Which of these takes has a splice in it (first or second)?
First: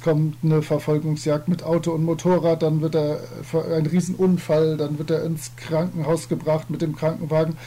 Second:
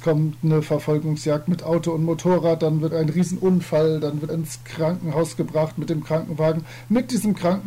second